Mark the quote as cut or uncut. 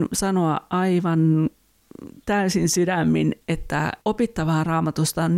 cut